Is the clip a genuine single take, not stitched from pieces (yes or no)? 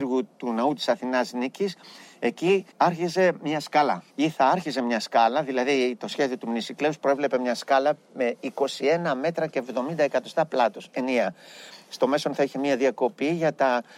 no